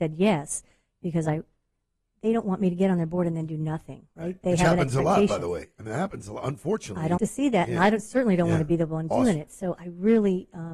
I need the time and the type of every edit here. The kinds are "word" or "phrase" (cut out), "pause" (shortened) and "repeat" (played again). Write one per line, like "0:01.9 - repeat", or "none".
0:07.2 - word